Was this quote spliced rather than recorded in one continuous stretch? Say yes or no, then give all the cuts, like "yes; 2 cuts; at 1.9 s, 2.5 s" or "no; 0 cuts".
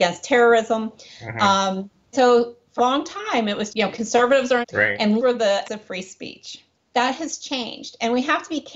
yes; 7 cuts; at 2.1 s, 2.8 s, 3.7 s, 4.6 s, 5.2 s, 5.6 s, 6.7 s